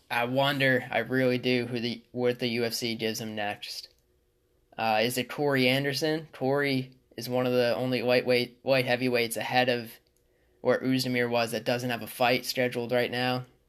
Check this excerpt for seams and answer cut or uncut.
uncut